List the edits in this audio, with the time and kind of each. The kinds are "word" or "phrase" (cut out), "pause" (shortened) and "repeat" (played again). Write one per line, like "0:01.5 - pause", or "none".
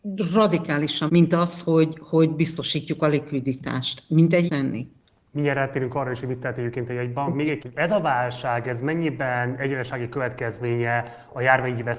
0:01.1 - phrase
0:04.5 - phrase
0:05.0 - pause
0:07.6 - phrase